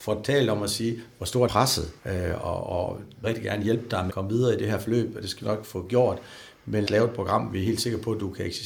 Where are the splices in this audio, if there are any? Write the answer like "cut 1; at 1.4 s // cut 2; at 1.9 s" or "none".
cut 1; at 1.5 s // cut 2; at 2.0 s // cut 3; at 3.2 s // cut 4; at 4.1 s // cut 5; at 5.4 s // cut 6; at 6.9 s